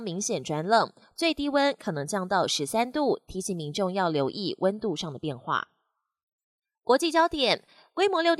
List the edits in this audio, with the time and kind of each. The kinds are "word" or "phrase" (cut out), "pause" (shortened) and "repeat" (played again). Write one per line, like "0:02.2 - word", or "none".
none